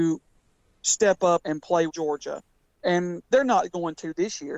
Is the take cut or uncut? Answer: cut